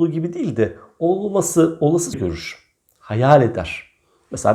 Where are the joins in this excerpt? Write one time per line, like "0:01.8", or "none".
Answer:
0:02.1

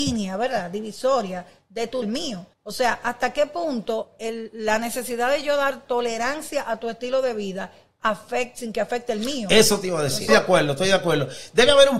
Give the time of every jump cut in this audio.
0:02.0
0:02.5
0:10.3

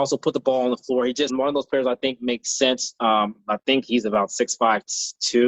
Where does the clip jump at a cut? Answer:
0:01.3

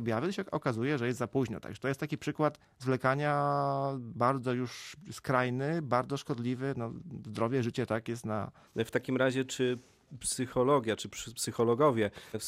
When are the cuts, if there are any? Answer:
none

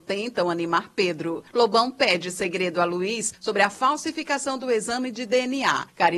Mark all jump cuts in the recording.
none

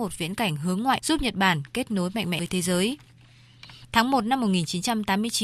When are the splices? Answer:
0:01.0
0:02.4

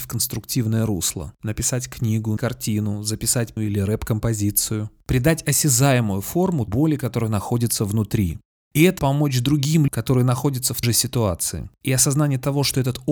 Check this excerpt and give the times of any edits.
0:02.4
0:03.6
0:06.7
0:09.0
0:09.9
0:10.8

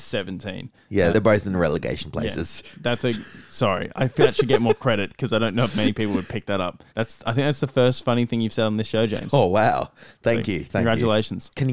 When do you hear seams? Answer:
0:01.1
0:04.2
0:06.9

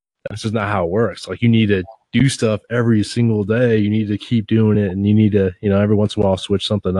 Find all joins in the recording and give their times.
none

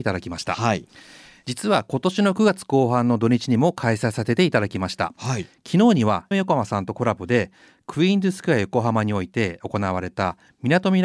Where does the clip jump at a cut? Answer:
0:06.3

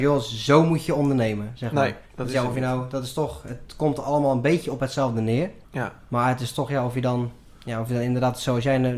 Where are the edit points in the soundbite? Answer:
0:02.1
0:05.6
0:07.4

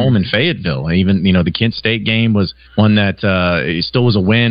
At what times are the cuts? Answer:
0:02.6

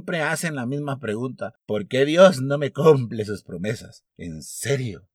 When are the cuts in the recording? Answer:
0:01.6
0:04.1

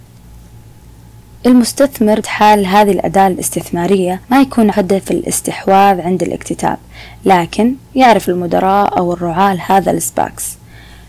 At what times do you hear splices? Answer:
0:02.2
0:04.2
0:04.7

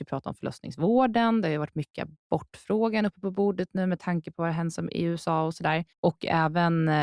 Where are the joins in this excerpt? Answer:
0:05.9

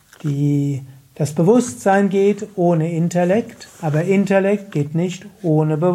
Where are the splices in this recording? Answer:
none

